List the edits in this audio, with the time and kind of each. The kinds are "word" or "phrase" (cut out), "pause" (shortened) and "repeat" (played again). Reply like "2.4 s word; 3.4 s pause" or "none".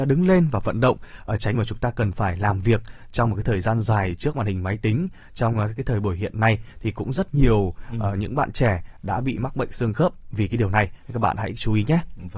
1.5 s phrase